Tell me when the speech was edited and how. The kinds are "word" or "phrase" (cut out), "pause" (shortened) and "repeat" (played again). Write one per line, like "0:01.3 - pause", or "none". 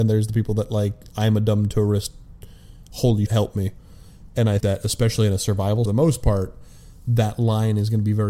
0:03.3 - word
0:04.6 - word
0:05.8 - phrase